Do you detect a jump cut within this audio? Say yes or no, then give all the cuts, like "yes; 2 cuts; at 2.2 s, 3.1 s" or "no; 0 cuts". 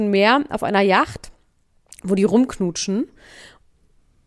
no; 0 cuts